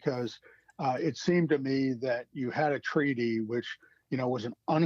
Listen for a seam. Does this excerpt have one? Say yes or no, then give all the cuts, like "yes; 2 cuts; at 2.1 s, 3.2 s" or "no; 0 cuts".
no; 0 cuts